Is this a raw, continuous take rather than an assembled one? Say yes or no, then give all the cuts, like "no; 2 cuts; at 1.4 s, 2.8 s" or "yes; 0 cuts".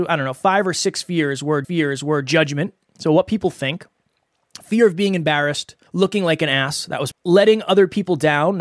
no; 3 cuts; at 1.6 s, 5.9 s, 7.1 s